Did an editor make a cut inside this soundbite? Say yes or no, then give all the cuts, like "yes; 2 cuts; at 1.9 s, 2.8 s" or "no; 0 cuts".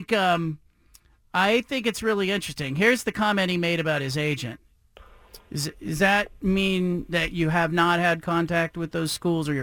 no; 0 cuts